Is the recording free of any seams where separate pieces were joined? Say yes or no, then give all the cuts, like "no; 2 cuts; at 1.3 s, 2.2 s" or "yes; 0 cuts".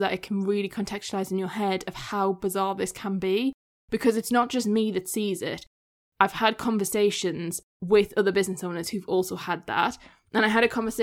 no; 1 cut; at 7.7 s